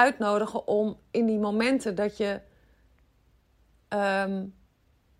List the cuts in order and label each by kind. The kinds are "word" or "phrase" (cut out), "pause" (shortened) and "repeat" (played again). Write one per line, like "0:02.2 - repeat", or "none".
none